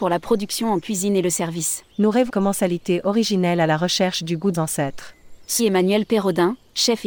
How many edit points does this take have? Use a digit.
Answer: 4